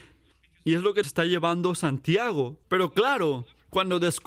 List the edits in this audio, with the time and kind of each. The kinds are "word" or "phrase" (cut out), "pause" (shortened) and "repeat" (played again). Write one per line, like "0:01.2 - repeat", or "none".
0:01.0 - word
0:02.6 - pause